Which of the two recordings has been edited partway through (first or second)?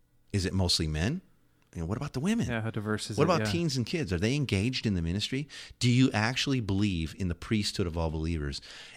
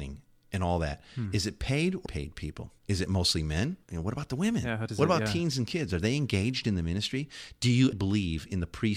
second